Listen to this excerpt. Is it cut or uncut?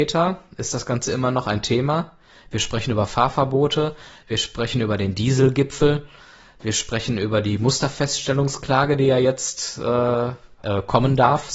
uncut